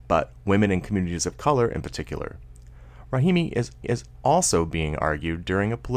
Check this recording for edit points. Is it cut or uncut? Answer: cut